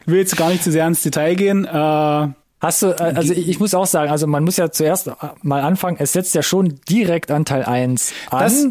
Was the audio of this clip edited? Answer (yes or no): no